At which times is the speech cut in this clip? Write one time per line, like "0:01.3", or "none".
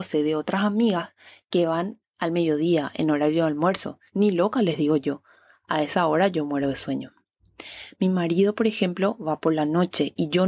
0:04.1